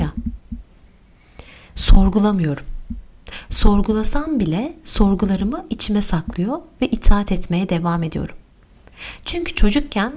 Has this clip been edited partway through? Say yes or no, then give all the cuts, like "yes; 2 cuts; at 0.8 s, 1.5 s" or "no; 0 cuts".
no; 0 cuts